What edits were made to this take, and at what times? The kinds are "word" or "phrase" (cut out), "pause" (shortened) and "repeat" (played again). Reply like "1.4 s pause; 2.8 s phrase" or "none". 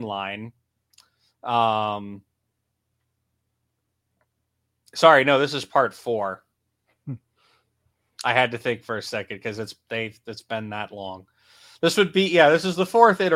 none